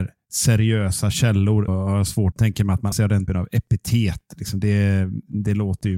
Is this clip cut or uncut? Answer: cut